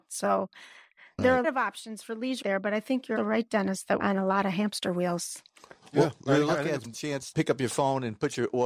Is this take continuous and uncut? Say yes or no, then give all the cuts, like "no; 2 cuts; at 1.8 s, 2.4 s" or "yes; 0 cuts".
no; 6 cuts; at 1.4 s, 2.4 s, 3.2 s, 4.0 s, 6.9 s, 7.3 s